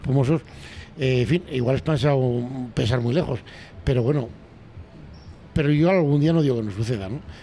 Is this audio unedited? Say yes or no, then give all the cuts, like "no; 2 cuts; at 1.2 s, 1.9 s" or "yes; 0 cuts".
yes; 0 cuts